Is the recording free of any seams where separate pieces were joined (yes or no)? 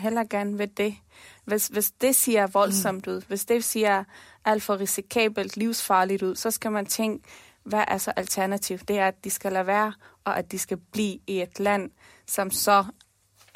yes